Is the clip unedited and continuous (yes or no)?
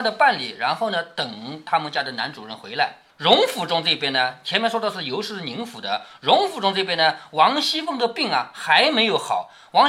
no